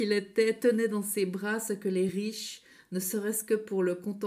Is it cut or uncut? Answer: uncut